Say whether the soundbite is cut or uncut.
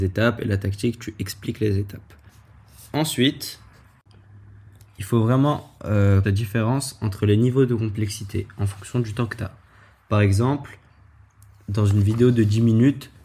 cut